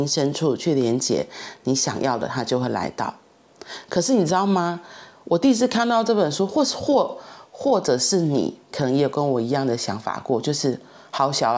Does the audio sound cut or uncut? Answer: cut